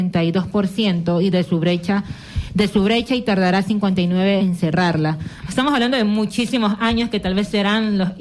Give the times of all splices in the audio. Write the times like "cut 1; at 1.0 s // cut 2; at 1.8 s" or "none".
cut 1; at 4.4 s